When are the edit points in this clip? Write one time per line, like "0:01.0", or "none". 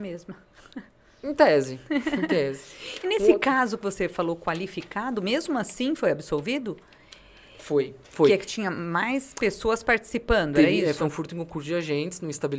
0:08.0